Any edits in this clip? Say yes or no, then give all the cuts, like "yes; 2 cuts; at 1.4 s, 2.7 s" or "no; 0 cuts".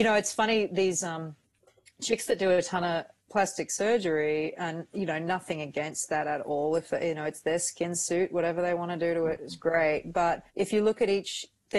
yes; 1 cut; at 10.5 s